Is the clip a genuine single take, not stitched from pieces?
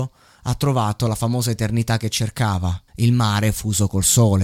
no; 1 cut; at 2.9 s

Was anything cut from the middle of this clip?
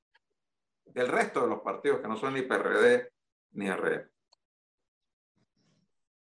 no; 0 cuts

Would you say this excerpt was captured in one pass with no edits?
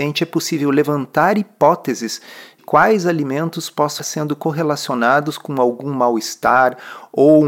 no; 2 cuts; at 2.6 s, 4.0 s

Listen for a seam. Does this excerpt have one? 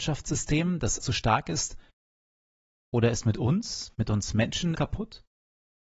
yes; 2 cuts; at 1.0 s, 4.7 s

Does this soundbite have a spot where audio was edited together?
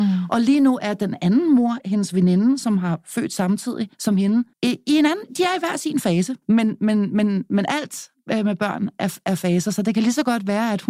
yes; 3 cuts; at 3.9 s, 4.5 s, 6.4 s

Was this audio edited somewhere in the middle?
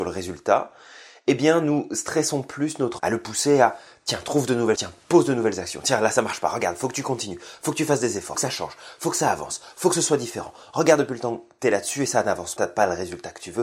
yes; 4 cuts; at 3.0 s, 4.8 s, 8.3 s, 12.6 s

